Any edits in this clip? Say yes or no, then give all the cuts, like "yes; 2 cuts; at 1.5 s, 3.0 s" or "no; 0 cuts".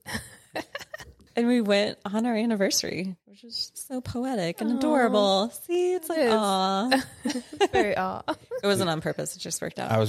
no; 0 cuts